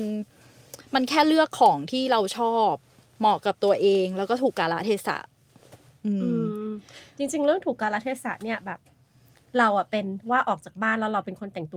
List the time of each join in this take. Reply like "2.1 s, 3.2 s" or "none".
none

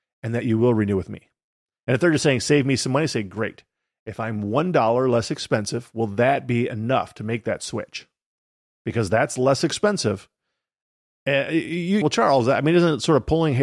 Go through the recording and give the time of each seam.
12.0 s

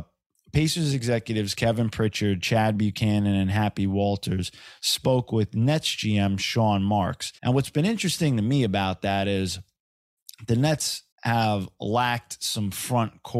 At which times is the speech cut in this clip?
7.4 s, 11.1 s

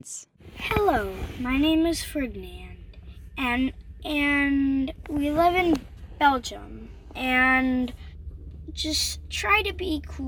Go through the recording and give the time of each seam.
4.0 s

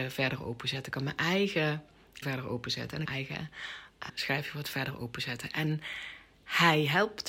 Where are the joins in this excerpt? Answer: 2.2 s, 3.0 s, 4.1 s

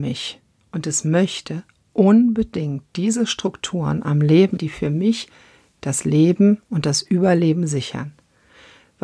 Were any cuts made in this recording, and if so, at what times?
4.6 s

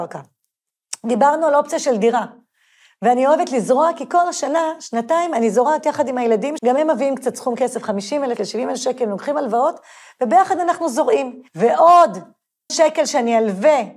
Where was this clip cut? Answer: 6.6 s, 8.4 s, 12.7 s

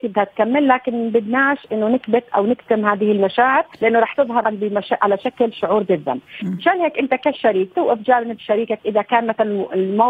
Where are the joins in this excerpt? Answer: 3.7 s, 4.4 s, 7.7 s

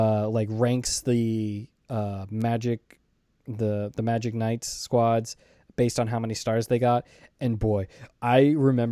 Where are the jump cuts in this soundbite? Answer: none

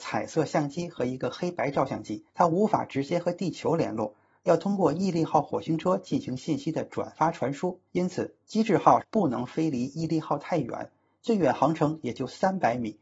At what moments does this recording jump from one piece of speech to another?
2.3 s, 7.9 s

